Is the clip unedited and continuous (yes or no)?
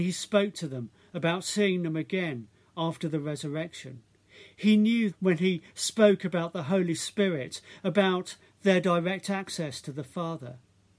no